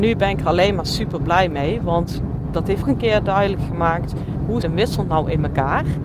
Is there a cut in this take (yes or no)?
yes